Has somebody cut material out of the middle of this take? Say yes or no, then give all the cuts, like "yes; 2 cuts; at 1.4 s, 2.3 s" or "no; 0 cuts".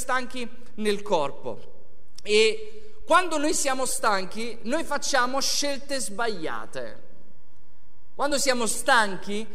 no; 0 cuts